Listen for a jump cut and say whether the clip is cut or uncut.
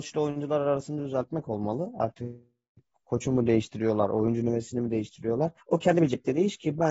cut